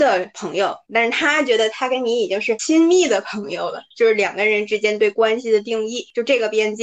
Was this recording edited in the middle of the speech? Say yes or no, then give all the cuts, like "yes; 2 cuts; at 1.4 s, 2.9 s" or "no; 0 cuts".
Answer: yes; 1 cut; at 3.9 s